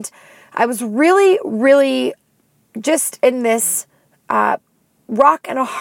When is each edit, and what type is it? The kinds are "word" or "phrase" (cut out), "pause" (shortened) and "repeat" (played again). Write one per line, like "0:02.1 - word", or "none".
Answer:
none